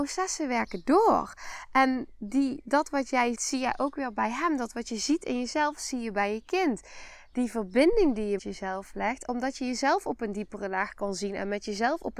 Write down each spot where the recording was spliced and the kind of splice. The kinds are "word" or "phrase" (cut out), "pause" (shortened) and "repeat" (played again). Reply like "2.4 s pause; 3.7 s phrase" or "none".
3.3 s word; 8.4 s word